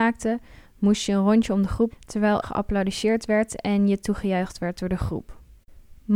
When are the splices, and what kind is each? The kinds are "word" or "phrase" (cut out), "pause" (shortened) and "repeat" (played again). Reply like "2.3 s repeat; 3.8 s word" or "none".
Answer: 1.9 s word; 2.4 s word